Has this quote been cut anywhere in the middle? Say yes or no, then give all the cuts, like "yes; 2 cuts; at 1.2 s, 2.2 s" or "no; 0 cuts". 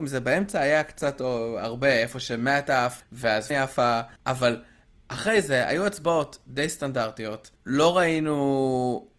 yes; 4 cuts; at 3.0 s, 3.5 s, 4.2 s, 7.6 s